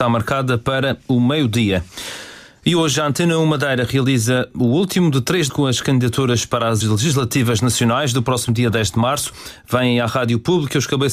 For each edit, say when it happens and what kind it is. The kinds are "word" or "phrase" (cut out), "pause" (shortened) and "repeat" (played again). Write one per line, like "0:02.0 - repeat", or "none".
0:05.5 - word
0:06.8 - word